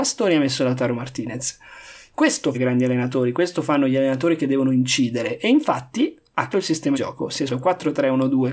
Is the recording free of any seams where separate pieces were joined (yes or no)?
no